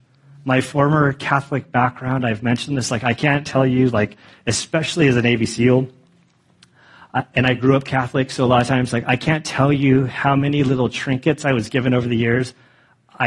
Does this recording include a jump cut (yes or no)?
no